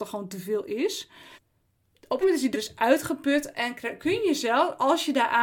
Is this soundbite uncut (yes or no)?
no